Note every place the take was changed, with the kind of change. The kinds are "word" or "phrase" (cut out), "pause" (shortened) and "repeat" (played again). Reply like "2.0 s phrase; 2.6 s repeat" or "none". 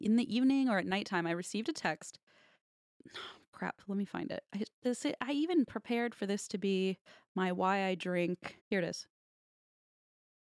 8.6 s pause